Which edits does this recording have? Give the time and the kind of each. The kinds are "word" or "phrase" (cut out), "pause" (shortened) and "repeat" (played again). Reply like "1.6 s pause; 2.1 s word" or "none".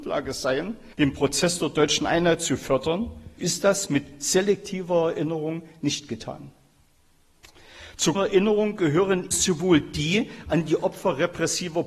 0.9 s pause; 3.4 s word; 8.1 s word; 9.3 s word